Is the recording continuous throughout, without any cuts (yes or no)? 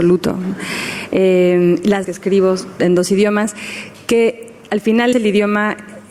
no